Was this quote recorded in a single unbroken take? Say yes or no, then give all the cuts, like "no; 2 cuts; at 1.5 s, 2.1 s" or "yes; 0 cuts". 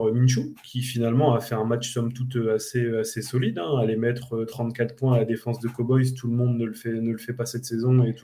yes; 0 cuts